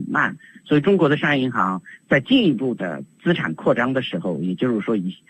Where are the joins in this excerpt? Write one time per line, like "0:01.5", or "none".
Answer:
0:03.1